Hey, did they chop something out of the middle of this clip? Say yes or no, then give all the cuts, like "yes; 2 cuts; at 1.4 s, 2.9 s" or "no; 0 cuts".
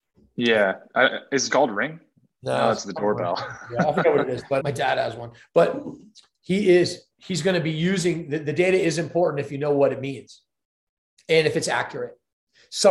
yes; 2 cuts; at 1.5 s, 4.6 s